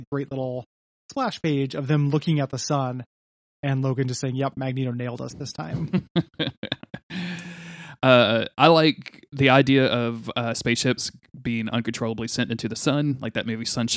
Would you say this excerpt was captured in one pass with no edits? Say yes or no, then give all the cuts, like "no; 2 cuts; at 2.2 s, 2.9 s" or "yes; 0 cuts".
yes; 0 cuts